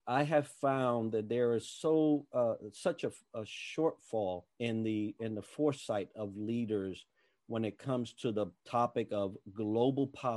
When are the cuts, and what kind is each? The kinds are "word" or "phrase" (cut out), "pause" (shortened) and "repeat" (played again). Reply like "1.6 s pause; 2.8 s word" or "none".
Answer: 4.5 s pause